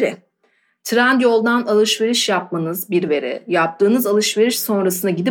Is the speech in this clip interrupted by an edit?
no; 0 cuts

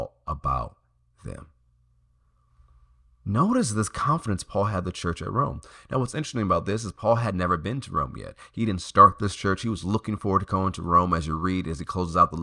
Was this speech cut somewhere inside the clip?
no; 0 cuts

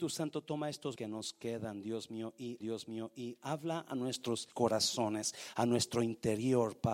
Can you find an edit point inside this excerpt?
yes; 3 cuts; at 1.0 s, 2.6 s, 4.5 s

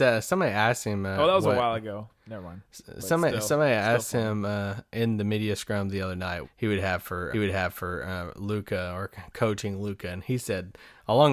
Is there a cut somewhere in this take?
yes; 2 cuts; at 6.4 s, 7.3 s

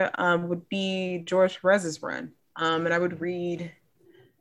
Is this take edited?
no; 0 cuts

